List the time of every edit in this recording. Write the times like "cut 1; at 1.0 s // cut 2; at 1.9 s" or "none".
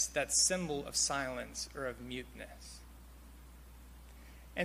none